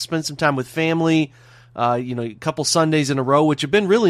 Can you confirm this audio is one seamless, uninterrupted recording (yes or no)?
yes